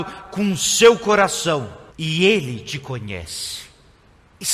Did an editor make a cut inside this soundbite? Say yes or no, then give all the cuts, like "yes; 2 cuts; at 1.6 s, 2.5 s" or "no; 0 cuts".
yes; 1 cut; at 1.9 s